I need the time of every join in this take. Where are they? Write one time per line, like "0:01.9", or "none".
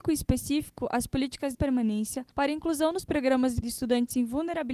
0:01.5
0:02.3
0:03.6